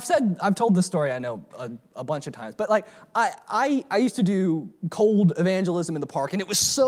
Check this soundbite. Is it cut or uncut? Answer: uncut